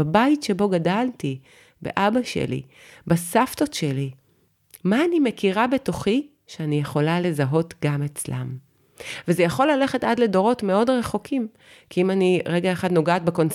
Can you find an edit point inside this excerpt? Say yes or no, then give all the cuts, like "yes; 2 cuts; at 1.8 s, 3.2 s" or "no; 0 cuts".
no; 0 cuts